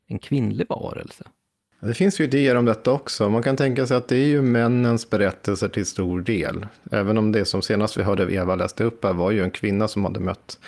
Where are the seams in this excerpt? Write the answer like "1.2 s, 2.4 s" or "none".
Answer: none